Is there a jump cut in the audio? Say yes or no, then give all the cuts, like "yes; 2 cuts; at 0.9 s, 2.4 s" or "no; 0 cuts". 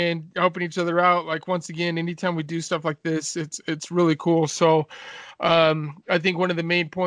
no; 0 cuts